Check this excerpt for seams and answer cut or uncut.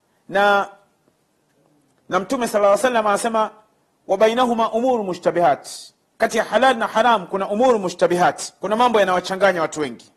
uncut